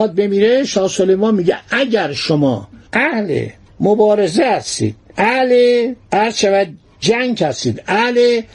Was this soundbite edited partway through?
no; 0 cuts

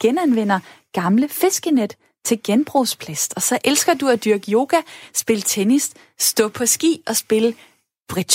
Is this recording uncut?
yes; 0 cuts

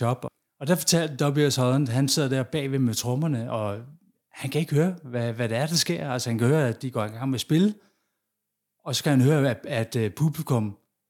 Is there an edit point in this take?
no; 0 cuts

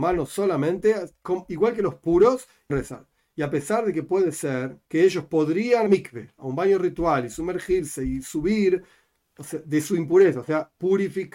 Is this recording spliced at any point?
yes; 3 cuts; at 2.7 s, 4.8 s, 5.9 s

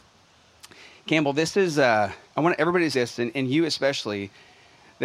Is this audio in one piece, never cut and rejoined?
no; 2 cuts; at 2.2 s, 2.9 s

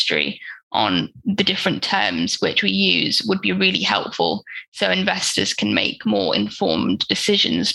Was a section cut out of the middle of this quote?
no; 0 cuts

